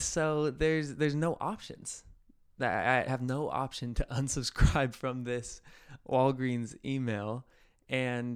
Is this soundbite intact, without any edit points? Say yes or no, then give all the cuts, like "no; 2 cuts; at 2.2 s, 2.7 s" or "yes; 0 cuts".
no; 1 cut; at 3.1 s